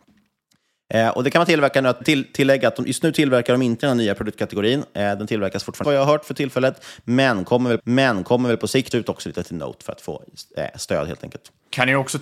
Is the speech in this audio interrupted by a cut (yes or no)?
yes